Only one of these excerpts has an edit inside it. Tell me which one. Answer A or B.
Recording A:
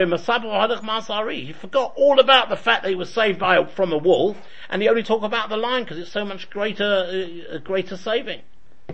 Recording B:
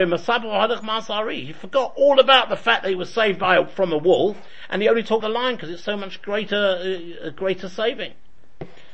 B